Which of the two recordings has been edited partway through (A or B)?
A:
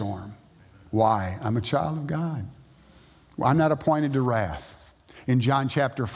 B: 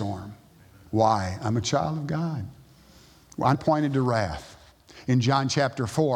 B